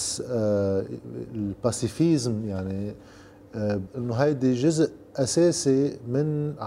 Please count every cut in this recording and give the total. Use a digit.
1